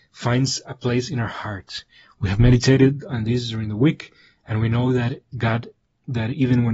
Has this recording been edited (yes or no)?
no